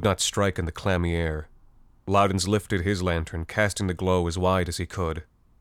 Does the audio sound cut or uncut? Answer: uncut